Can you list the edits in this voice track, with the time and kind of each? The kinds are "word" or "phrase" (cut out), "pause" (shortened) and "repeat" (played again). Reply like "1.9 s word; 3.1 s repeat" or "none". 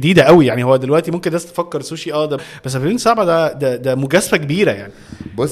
2.4 s phrase